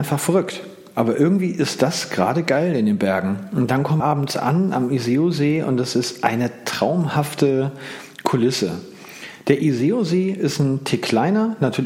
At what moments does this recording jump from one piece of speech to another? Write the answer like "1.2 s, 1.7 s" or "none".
4.0 s